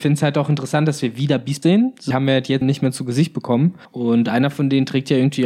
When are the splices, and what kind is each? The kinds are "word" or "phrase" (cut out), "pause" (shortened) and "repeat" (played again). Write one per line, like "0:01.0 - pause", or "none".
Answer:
0:01.6 - word
0:02.1 - phrase
0:02.6 - phrase
0:03.8 - pause